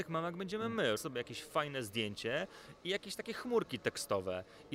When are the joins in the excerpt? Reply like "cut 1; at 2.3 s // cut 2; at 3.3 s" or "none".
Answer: cut 1; at 1.0 s